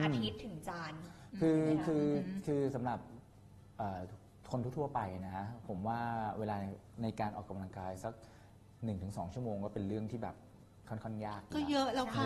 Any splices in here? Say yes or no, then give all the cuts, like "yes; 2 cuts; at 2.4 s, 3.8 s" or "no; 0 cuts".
no; 0 cuts